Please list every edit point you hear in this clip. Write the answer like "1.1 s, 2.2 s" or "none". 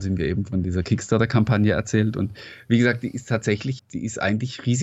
3.8 s